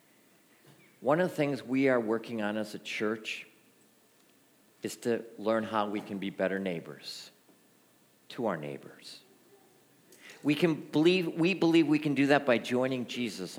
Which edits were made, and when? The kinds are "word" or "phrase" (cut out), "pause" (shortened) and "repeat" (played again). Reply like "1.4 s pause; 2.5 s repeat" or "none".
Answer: none